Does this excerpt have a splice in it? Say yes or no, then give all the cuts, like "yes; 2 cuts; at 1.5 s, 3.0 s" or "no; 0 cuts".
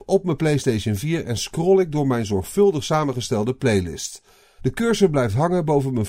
no; 0 cuts